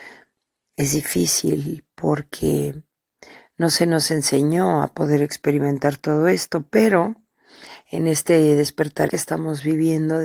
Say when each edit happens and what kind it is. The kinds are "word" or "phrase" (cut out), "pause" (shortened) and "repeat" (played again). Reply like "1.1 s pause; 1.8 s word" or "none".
9.1 s word